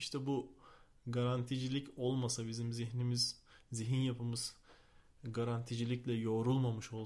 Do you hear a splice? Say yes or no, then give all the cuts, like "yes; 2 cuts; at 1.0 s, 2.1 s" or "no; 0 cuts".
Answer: no; 0 cuts